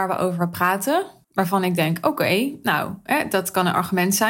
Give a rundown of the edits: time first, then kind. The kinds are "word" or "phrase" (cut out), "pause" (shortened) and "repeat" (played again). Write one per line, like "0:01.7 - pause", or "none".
0:01.2 - pause